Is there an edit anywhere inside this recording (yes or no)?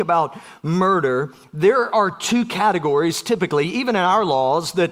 no